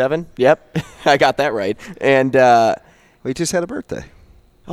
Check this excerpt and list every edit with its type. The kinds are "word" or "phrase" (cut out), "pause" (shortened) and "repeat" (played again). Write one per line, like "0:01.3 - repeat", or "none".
none